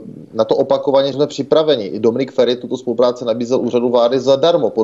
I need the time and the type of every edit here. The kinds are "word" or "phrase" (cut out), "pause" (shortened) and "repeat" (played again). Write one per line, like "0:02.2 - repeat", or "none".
0:01.1 - word